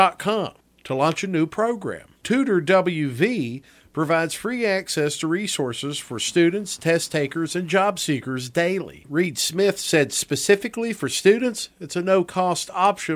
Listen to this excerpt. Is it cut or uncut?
uncut